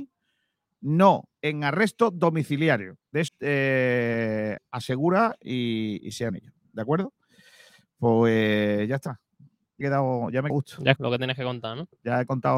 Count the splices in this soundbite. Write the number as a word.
eight